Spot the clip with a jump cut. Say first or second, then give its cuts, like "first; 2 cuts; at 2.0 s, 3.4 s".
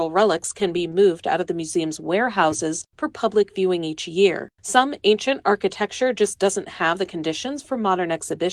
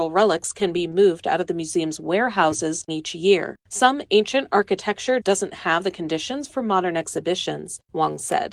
second; 2 cuts; at 2.9 s, 5.2 s